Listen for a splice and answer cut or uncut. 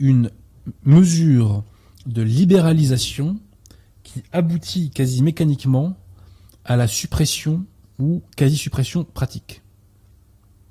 uncut